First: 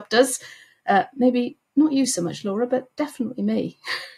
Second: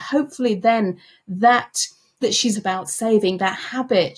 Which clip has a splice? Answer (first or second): second